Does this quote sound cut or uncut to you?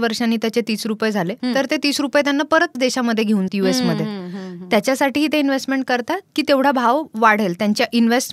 cut